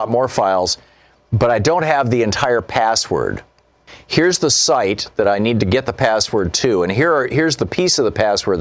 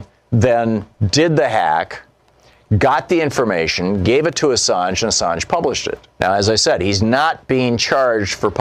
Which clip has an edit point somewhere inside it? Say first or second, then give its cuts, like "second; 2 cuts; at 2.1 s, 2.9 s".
second; 1 cut; at 6.1 s